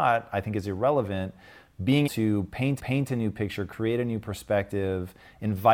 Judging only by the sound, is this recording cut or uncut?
cut